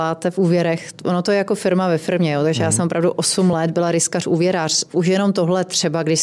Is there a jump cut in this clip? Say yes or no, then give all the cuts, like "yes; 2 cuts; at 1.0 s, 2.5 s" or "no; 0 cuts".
no; 0 cuts